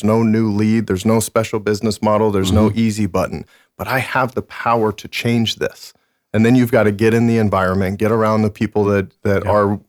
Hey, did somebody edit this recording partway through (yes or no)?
no